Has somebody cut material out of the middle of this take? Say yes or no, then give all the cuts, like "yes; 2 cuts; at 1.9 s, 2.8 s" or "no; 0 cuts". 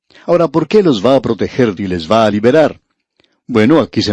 yes; 1 cut; at 1.8 s